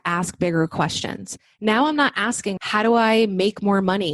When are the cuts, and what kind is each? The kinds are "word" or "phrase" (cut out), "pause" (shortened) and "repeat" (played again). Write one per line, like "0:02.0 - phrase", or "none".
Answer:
0:02.6 - word